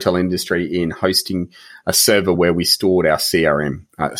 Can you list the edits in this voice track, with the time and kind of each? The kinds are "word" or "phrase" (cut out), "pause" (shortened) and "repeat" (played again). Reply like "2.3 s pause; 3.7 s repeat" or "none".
none